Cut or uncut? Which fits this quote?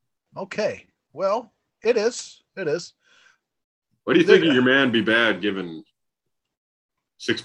uncut